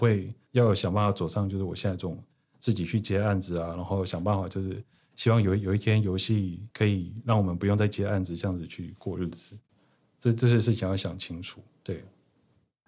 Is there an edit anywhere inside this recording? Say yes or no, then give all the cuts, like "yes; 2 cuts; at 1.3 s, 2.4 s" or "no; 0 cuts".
yes; 1 cut; at 6.7 s